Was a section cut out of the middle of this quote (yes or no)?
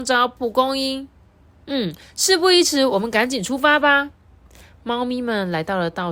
no